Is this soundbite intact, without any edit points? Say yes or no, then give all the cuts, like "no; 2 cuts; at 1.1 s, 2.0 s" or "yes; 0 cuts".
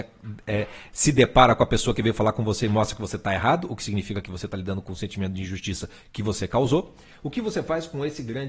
yes; 0 cuts